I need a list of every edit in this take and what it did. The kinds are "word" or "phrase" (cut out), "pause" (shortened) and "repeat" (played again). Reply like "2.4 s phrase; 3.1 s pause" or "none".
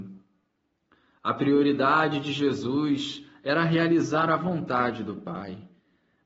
none